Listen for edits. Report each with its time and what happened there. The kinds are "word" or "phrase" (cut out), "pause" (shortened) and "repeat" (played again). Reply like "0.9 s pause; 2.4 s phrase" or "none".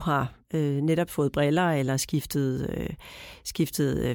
1.1 s word